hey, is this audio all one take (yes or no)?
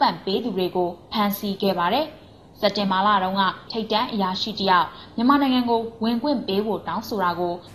no